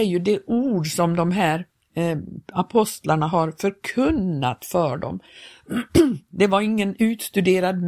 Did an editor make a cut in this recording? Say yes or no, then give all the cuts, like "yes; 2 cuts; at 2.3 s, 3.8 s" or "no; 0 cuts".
no; 0 cuts